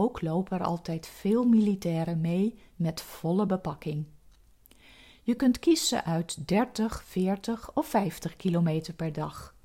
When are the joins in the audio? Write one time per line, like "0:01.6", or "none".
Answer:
none